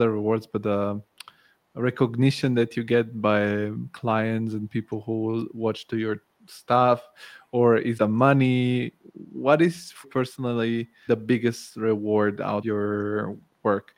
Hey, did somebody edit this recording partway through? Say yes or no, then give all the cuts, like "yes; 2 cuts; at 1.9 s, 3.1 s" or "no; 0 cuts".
yes; 4 cuts; at 8.0 s, 10.0 s, 11.1 s, 12.6 s